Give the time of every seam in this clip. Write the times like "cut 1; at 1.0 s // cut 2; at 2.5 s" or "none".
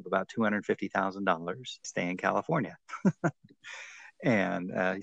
cut 1; at 1.8 s